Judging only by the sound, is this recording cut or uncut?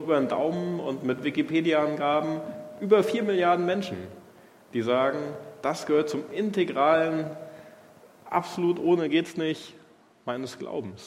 uncut